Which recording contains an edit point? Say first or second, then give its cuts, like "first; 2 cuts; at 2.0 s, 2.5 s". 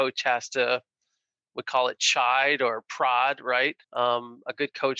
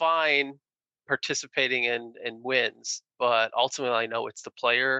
first; 1 cut; at 3.8 s